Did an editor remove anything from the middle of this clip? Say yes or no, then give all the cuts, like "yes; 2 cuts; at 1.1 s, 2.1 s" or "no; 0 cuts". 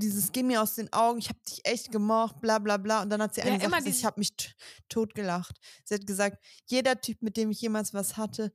no; 0 cuts